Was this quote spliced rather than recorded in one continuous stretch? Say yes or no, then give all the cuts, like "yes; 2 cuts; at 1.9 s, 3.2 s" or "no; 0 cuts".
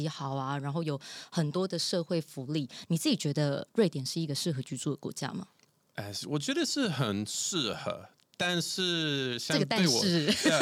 no; 0 cuts